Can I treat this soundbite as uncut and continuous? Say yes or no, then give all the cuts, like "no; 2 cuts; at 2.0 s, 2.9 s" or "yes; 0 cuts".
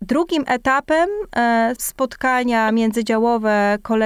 no; 1 cut; at 1.8 s